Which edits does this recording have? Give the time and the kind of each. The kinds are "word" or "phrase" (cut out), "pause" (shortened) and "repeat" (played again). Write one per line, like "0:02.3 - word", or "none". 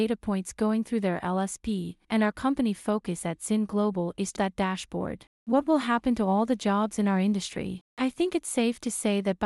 0:02.0 - pause
0:04.4 - word
0:05.3 - pause
0:07.9 - pause